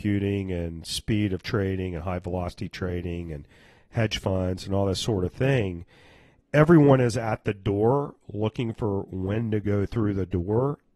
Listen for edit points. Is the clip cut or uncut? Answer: uncut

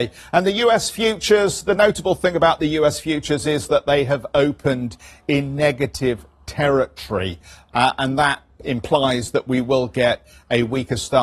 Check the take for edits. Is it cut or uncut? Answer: uncut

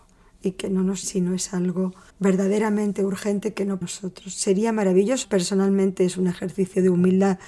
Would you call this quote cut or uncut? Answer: cut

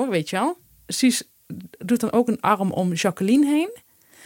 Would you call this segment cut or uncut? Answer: uncut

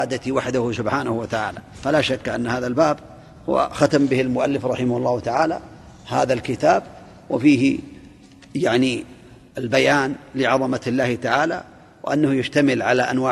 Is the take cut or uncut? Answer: uncut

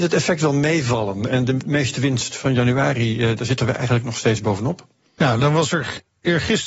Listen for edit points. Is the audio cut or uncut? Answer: uncut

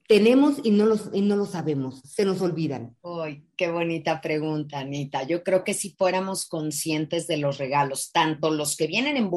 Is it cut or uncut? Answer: uncut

